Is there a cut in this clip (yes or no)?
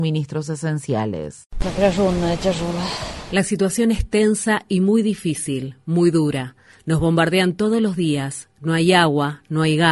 no